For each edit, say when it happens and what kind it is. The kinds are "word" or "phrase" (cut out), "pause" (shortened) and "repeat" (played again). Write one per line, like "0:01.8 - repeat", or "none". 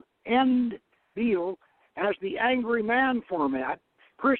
none